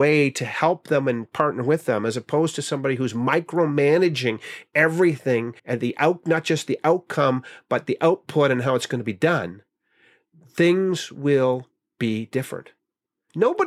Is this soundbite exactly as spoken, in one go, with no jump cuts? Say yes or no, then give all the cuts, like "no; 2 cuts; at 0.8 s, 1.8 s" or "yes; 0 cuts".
no; 1 cut; at 5.6 s